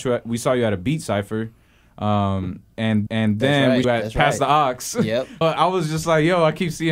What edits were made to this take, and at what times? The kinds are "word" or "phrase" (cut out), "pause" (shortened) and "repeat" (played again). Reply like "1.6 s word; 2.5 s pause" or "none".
3.1 s repeat; 3.8 s phrase; 5.4 s word